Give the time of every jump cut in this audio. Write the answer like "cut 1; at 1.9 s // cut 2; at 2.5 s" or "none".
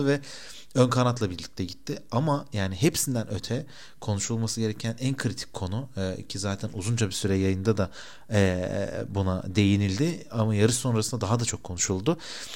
none

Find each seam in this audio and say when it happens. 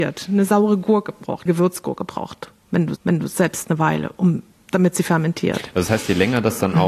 cut 1; at 1.5 s // cut 2; at 3.0 s // cut 3; at 3.6 s // cut 4; at 4.5 s

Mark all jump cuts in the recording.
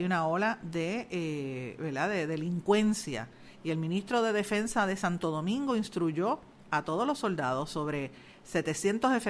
none

